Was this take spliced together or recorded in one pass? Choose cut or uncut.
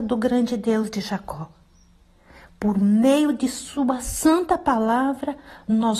uncut